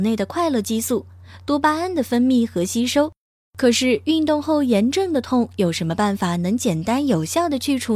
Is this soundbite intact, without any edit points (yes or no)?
yes